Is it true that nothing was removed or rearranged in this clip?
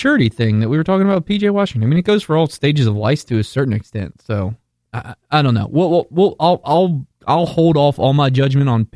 yes; 0 cuts

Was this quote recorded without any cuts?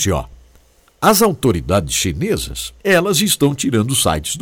no; 1 cut; at 2.8 s

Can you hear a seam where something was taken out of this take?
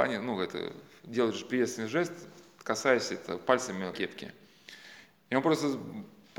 yes; 1 cut; at 3.9 s

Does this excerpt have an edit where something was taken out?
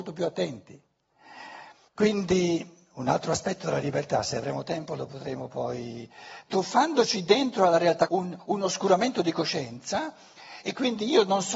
yes; 2 cuts; at 1.9 s, 8.1 s

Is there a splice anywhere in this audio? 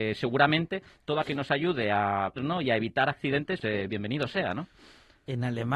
yes; 3 cuts; at 1.2 s, 2.4 s, 3.6 s

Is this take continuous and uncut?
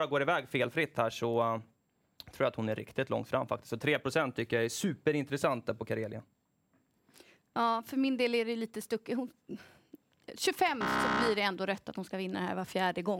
yes; 0 cuts

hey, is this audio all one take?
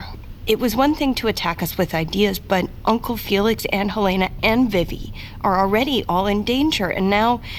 yes; 0 cuts

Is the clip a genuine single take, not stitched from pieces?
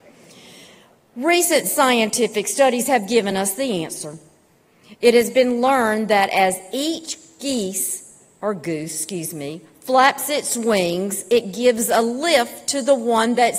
yes; 0 cuts

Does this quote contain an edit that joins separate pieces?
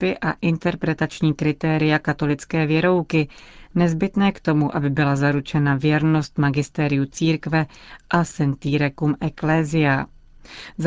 no; 0 cuts

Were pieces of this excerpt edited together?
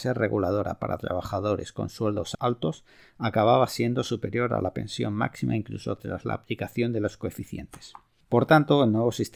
no; 0 cuts

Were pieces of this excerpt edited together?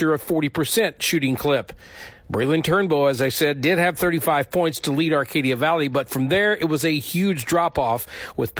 no; 0 cuts

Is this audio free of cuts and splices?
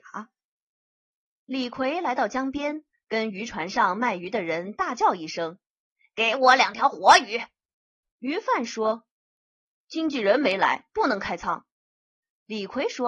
yes; 0 cuts

